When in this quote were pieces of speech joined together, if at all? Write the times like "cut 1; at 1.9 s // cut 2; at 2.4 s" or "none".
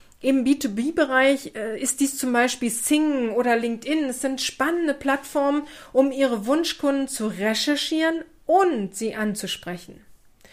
none